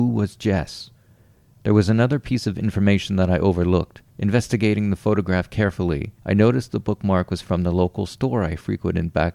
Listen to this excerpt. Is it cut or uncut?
cut